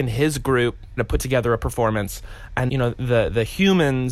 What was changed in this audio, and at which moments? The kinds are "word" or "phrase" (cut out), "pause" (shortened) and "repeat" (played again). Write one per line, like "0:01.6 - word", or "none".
0:01.0 - word
0:02.7 - word